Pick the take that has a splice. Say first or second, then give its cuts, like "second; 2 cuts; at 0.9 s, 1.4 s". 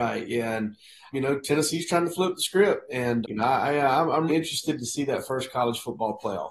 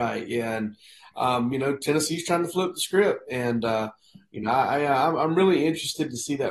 first; 3 cuts; at 1.1 s, 3.2 s, 4.3 s